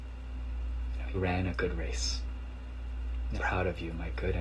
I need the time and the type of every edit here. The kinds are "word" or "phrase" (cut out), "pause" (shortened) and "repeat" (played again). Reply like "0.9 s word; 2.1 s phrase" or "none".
1.1 s word; 3.4 s word